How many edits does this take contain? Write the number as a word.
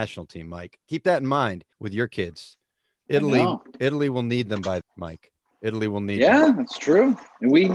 two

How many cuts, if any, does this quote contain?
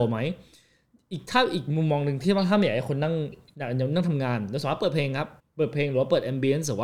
one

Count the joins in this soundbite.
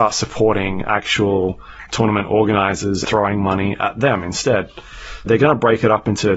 three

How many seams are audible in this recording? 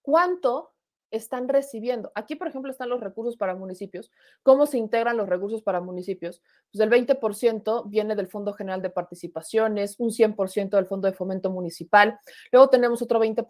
zero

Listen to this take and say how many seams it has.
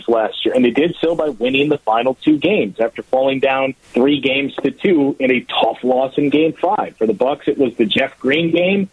one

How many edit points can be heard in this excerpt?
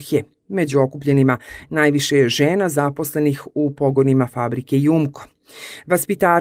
zero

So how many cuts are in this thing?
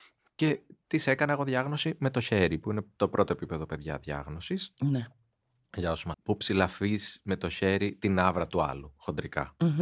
one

